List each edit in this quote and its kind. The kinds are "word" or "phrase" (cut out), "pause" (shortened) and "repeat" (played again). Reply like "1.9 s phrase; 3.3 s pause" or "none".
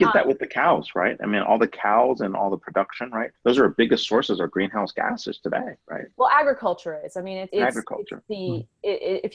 3.4 s pause; 7.5 s word